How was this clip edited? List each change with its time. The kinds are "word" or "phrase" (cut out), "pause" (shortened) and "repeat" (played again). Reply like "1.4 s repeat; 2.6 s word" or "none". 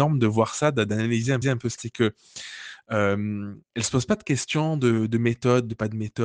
1.4 s repeat; 1.8 s phrase; 3.6 s pause